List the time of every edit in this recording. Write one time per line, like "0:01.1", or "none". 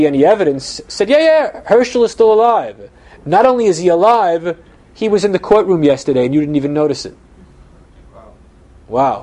none